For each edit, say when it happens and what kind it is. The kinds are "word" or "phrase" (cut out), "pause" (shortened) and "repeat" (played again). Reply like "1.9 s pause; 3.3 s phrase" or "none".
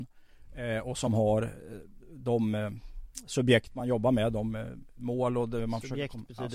none